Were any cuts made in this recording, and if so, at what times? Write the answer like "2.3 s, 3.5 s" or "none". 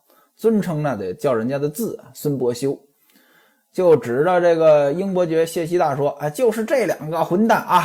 none